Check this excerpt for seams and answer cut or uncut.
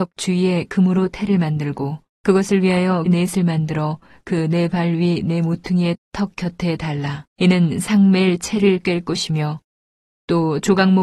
cut